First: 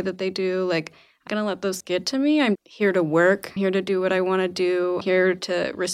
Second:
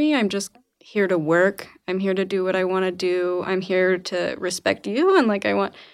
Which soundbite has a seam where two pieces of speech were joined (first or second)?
first